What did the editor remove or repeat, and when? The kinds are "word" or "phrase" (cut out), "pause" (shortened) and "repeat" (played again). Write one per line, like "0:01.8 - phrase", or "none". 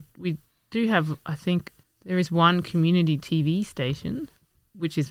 0:01.8 - pause